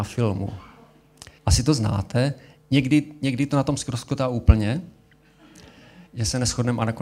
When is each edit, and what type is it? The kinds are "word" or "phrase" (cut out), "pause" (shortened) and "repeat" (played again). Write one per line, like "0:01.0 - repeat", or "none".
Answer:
0:01.4 - pause
0:06.1 - pause

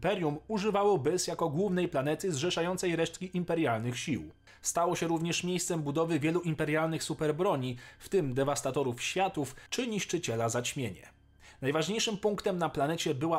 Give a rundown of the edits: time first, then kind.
none

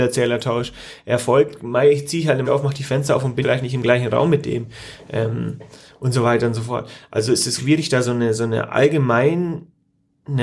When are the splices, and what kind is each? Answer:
0:02.4 - word
0:03.4 - word
0:07.6 - word

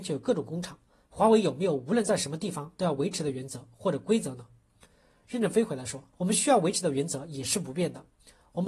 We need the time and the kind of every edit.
0:06.1 - pause

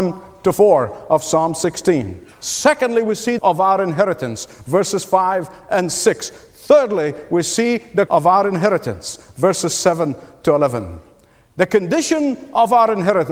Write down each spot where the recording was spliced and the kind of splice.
0:02.3 - pause
0:03.4 - phrase
0:08.1 - word

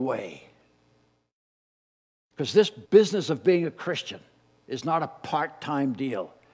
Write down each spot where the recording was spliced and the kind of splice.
0:02.8 - pause

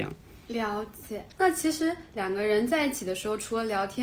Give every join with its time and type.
0:01.3 - pause

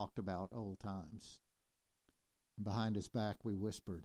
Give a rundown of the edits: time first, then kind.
none

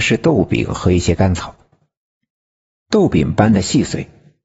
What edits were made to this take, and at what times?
none

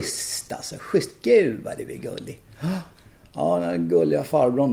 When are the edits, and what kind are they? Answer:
none

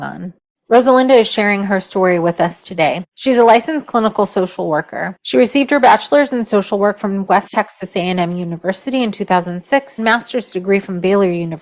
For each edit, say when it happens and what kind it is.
0:10.0 - word

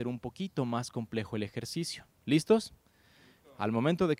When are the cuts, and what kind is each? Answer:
none

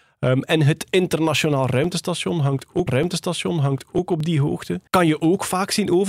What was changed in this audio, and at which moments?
0:02.9 - repeat
0:04.9 - pause

